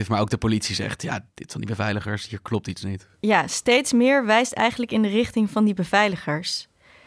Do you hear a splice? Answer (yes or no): yes